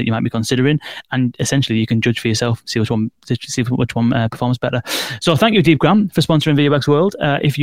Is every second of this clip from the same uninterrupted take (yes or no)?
yes